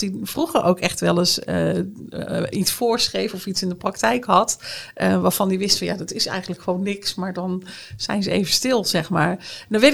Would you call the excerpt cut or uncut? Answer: uncut